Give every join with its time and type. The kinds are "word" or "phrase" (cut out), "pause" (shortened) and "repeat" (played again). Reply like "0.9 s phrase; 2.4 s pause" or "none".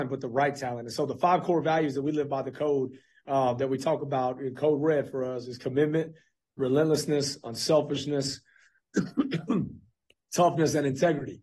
none